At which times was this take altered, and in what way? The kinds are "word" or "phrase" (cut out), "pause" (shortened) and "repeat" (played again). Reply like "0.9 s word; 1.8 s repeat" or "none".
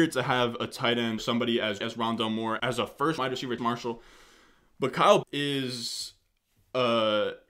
1.2 s word; 1.8 s word; 2.6 s word; 3.2 s word; 3.6 s word; 5.2 s word